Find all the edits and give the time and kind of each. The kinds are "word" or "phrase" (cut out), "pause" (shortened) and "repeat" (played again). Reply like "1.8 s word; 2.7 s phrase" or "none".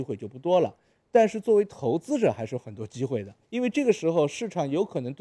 3.4 s pause